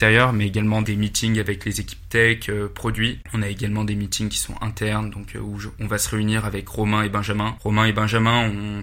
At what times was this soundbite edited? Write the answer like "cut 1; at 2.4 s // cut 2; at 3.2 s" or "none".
none